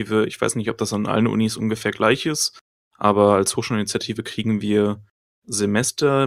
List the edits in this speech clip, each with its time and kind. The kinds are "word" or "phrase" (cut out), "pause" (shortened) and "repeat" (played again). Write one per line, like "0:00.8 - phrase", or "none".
none